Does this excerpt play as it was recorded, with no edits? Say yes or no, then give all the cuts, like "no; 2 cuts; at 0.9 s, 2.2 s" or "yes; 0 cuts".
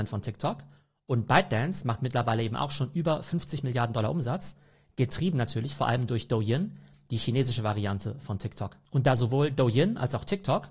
yes; 0 cuts